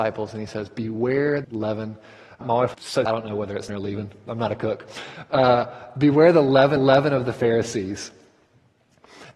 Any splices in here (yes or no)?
yes